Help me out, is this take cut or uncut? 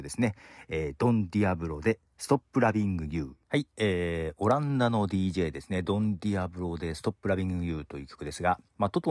cut